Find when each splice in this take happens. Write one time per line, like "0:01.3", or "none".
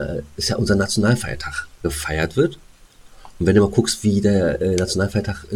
0:01.8